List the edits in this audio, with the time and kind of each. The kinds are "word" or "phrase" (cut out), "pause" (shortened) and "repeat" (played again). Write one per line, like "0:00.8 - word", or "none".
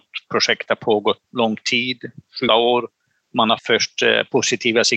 0:01.2 - word
0:02.5 - word
0:03.6 - word